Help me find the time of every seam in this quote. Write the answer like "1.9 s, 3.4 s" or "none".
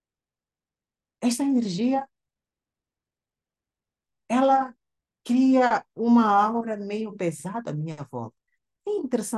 none